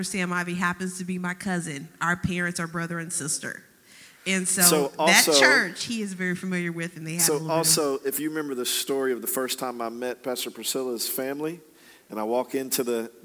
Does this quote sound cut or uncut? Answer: uncut